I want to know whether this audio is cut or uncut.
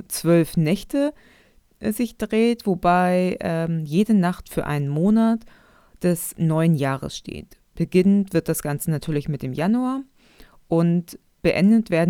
uncut